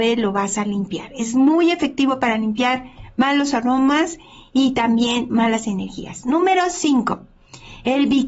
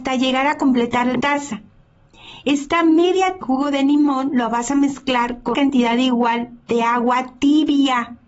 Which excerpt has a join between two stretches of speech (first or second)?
second